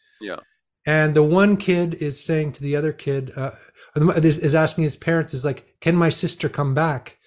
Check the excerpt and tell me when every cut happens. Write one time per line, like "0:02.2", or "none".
none